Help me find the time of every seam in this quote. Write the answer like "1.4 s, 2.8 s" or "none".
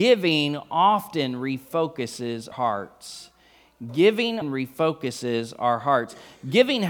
2.5 s, 4.4 s